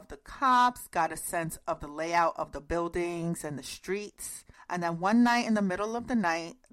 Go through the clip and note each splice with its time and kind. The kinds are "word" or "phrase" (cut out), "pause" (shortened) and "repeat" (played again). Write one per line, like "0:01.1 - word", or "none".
0:04.5 - pause